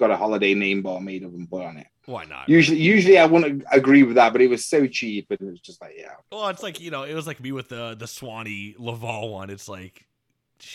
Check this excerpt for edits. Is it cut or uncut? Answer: cut